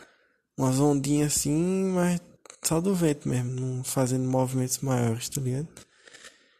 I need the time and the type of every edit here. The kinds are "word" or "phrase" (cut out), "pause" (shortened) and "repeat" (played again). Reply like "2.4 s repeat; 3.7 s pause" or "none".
none